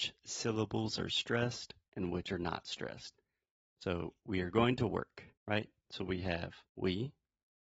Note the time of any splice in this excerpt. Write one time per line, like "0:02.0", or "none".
0:05.4
0:06.7